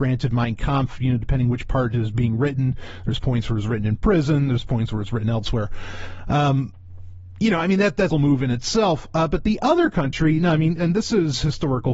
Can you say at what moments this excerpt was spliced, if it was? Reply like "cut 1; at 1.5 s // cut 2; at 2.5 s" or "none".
cut 1; at 8.1 s // cut 2; at 10.8 s